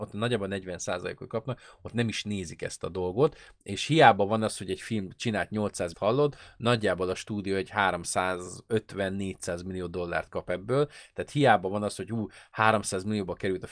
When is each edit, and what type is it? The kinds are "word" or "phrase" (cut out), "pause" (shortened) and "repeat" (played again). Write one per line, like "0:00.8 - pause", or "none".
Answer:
0:05.9 - phrase